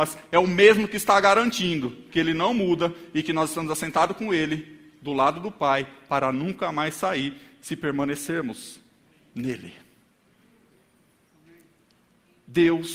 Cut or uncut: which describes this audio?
uncut